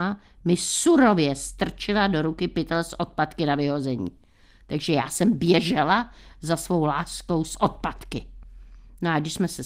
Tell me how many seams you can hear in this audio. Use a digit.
0